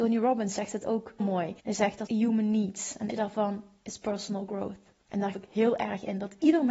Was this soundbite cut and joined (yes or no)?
yes